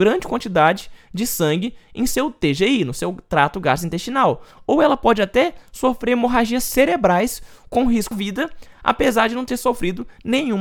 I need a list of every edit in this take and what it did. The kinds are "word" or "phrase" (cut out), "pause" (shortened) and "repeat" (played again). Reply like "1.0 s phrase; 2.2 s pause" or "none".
8.1 s word